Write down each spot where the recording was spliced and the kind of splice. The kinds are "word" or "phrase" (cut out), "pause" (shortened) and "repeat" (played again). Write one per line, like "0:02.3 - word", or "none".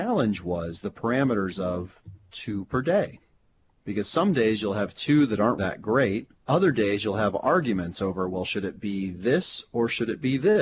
0:05.6 - word
0:06.4 - pause